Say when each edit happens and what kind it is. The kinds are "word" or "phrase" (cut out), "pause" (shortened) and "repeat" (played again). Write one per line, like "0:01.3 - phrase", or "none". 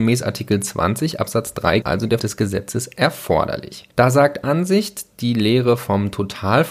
0:01.8 - word
0:02.2 - word
0:03.9 - pause
0:04.4 - word